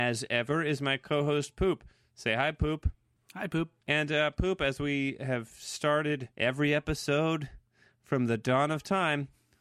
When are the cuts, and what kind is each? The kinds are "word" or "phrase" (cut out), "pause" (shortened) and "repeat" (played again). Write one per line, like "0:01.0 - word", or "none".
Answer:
0:03.8 - pause
0:06.3 - pause